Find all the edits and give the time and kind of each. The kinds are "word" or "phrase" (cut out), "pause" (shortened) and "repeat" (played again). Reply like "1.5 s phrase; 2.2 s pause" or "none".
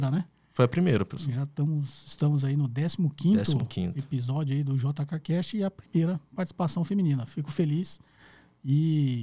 none